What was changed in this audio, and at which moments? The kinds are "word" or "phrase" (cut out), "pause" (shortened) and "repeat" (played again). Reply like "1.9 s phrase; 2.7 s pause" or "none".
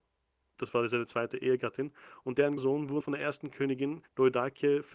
2.6 s word; 3.0 s word; 4.1 s pause